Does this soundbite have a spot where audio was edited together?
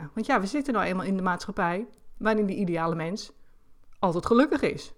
no; 0 cuts

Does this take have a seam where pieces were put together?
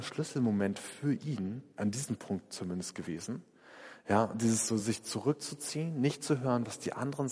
no; 0 cuts

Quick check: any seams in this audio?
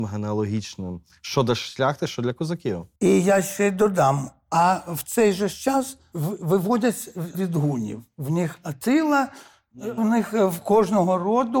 yes; 3 cuts; at 6.1 s, 7.3 s, 10.0 s

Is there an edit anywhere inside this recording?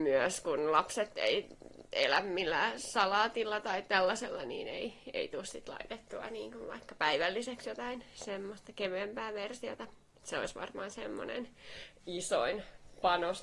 no; 0 cuts

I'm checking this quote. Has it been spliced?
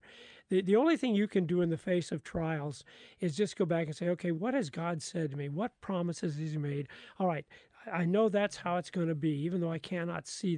no; 0 cuts

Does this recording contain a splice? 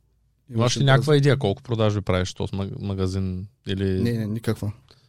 no; 0 cuts

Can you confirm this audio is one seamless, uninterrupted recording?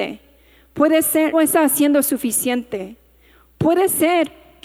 no; 1 cut; at 1.3 s

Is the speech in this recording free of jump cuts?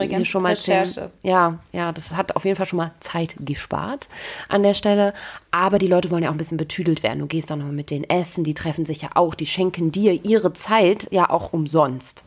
yes; 0 cuts

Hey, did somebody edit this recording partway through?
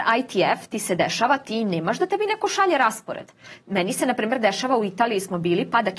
no; 0 cuts

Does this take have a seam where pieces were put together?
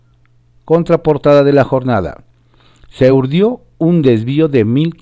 no; 0 cuts

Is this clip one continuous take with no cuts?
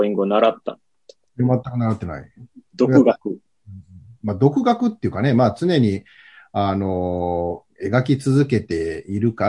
yes; 0 cuts

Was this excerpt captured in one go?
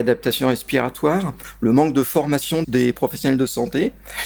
no; 1 cut; at 2.6 s

